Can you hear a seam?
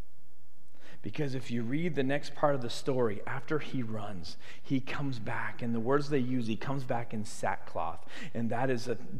no; 0 cuts

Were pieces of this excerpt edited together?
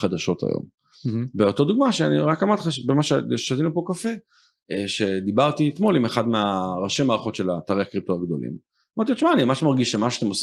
no; 0 cuts

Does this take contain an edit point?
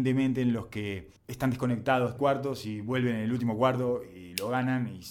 yes; 2 cuts; at 1.2 s, 2.2 s

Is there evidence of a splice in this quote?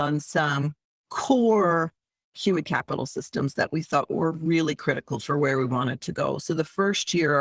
no; 0 cuts

